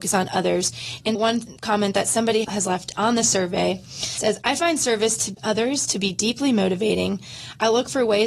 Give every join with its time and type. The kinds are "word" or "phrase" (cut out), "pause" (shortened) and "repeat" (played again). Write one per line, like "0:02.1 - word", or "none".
0:01.2 - word